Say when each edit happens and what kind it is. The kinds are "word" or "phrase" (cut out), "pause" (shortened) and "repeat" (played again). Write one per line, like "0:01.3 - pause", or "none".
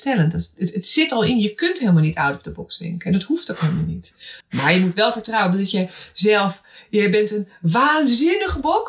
0:04.4 - pause